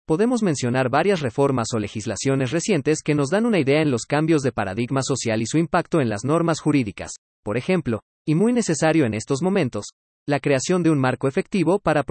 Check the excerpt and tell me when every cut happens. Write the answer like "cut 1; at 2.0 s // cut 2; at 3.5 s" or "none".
none